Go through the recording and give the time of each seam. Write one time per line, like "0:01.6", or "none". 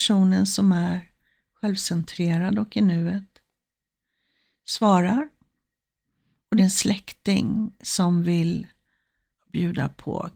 0:06.6
0:09.4

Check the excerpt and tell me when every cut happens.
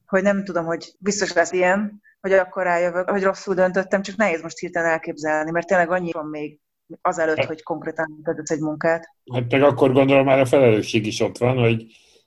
0:01.0
0:01.5
0:03.1
0:06.1
0:07.0
0:09.2

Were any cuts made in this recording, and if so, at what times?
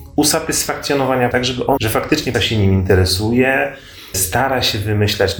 0:01.3
0:01.8
0:02.3
0:04.1

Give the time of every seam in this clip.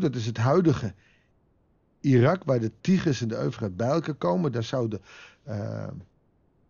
none

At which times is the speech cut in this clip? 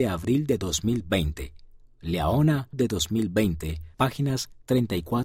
0:02.7
0:03.9

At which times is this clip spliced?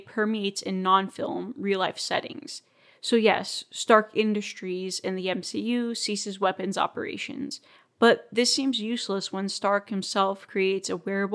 none

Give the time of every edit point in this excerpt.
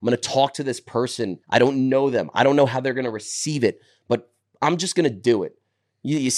0:01.4

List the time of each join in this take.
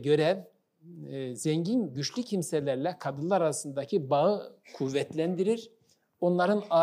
0:04.6

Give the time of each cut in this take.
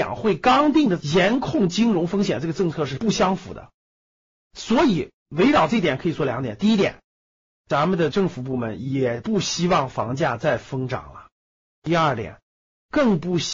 none

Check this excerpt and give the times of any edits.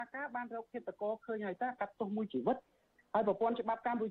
none

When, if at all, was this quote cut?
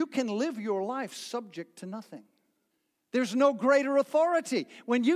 0:02.7

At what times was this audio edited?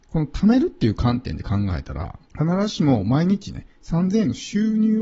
0:02.3

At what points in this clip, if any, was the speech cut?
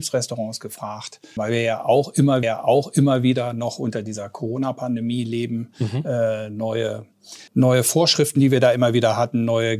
0:01.4
0:02.4
0:07.5

